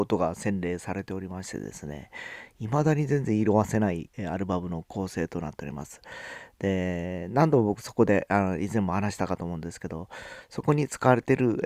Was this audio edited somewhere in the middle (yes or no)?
yes